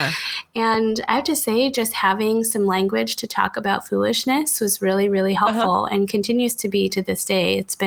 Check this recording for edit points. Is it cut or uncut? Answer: uncut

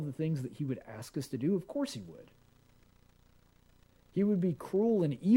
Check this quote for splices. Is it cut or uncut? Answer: uncut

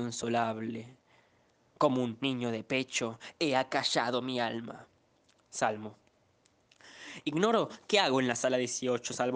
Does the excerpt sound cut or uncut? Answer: uncut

